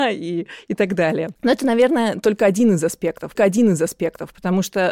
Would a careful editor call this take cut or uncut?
cut